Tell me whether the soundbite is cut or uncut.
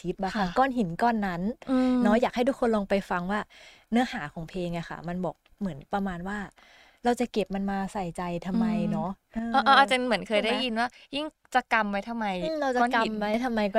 uncut